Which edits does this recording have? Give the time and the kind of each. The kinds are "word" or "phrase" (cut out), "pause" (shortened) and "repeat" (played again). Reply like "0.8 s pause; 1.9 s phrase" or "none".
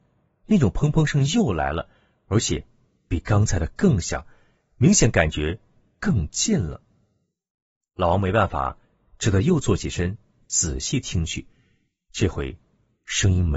none